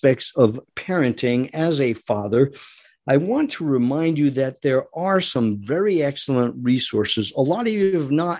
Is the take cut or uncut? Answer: uncut